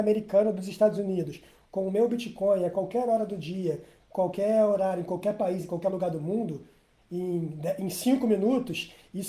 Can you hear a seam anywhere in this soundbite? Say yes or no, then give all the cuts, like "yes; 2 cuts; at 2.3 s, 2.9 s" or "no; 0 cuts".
no; 0 cuts